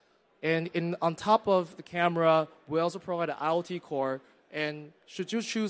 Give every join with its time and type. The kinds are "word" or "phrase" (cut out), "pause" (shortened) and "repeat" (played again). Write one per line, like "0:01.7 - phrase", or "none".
none